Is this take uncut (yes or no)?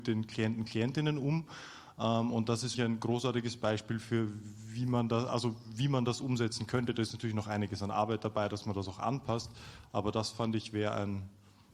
no